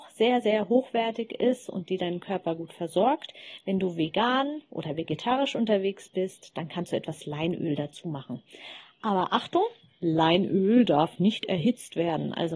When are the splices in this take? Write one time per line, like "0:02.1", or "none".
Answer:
none